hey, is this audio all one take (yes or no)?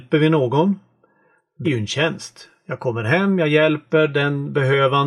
no